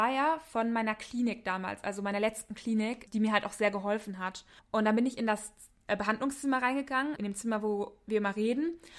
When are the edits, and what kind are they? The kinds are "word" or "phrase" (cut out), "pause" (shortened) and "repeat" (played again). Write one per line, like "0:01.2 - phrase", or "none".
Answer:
0:03.1 - word
0:04.6 - pause
0:07.2 - word